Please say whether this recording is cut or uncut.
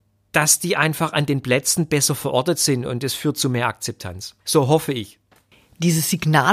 cut